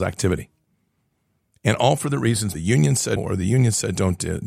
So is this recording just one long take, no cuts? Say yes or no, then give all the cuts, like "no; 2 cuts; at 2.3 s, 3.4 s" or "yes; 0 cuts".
no; 2 cuts; at 2.5 s, 3.2 s